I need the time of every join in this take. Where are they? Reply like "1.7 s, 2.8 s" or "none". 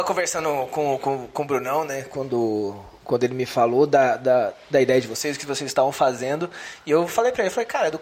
none